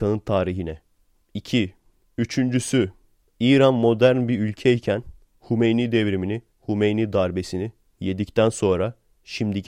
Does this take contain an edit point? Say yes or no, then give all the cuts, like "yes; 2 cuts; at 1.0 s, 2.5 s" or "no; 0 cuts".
no; 0 cuts